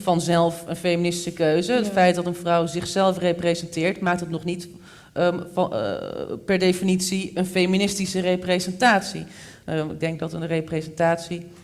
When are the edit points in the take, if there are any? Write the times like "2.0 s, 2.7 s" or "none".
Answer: none